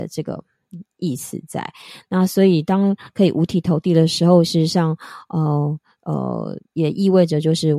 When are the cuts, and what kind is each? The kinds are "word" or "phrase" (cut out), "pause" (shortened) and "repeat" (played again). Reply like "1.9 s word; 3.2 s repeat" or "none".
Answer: 6.6 s pause

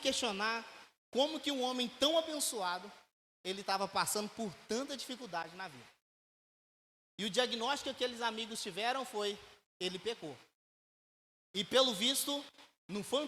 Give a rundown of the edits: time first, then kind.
none

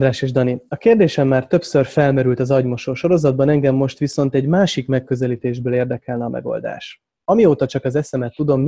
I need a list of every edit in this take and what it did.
none

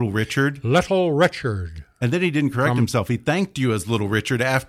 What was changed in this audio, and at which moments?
none

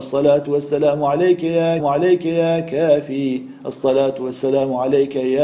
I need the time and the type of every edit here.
1.8 s repeat

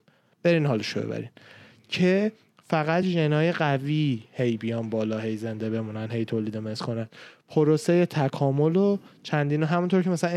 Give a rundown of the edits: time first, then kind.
none

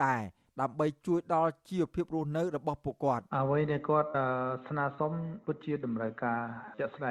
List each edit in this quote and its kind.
3.3 s pause

